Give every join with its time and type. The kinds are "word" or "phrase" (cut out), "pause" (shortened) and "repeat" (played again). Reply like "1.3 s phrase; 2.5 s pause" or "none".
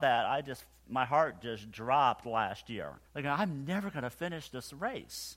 3.1 s pause